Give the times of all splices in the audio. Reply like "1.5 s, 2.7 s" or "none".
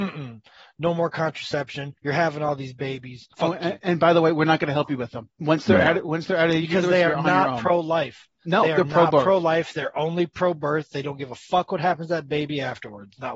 2.0 s, 3.3 s, 5.3 s